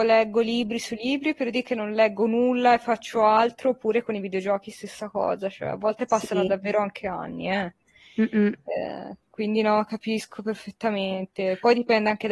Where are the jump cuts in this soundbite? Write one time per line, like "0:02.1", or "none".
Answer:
none